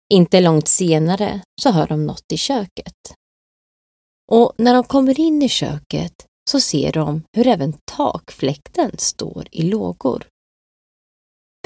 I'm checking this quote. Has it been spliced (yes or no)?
no